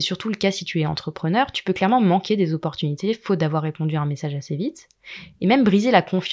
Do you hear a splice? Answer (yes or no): no